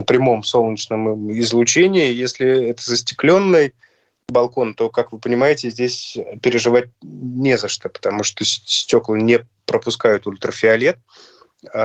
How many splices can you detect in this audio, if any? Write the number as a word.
zero